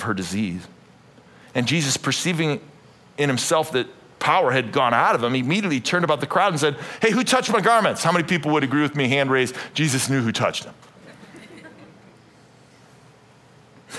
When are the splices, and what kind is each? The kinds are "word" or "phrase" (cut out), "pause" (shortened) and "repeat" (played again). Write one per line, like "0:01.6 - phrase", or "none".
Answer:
none

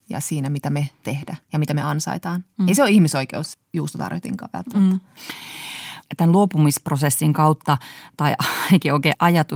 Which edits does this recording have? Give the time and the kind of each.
0:01.0 - word
0:01.4 - pause
0:03.5 - phrase

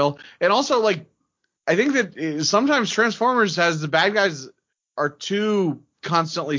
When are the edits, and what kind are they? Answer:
none

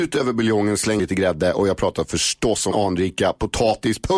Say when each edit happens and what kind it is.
0:01.0 - word
0:02.7 - word

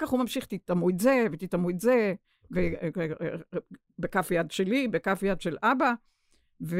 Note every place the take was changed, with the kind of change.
none

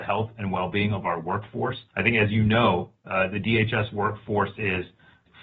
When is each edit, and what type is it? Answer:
0:01.9 - pause

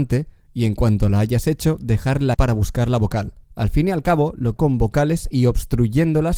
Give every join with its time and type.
0:02.3 - word
0:03.4 - pause
0:04.6 - phrase

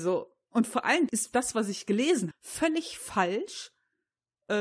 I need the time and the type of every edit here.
0:01.1 - word
0:02.3 - word

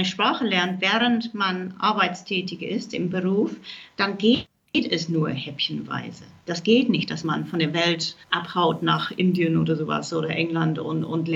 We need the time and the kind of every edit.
0:08.2 - pause

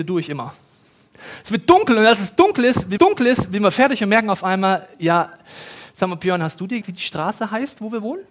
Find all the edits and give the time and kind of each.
0:03.0 - repeat
0:06.8 - word

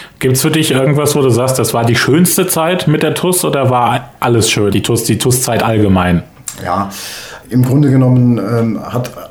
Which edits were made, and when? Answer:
0:04.7 - word
0:07.4 - word

